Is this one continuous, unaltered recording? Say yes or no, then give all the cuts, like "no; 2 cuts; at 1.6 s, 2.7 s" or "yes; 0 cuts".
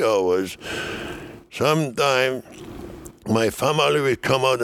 yes; 0 cuts